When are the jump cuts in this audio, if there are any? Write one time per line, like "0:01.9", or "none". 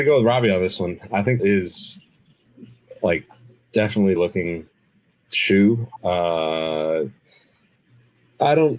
0:01.4
0:04.2